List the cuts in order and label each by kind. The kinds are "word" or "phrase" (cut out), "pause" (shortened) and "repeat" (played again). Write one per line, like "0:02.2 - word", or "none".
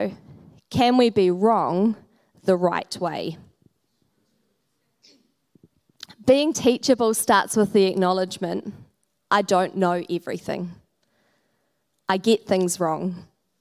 none